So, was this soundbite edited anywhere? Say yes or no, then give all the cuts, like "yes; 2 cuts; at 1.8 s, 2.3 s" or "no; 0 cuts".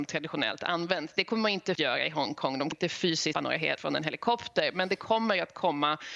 yes; 4 cuts; at 1.7 s, 2.7 s, 3.3 s, 3.8 s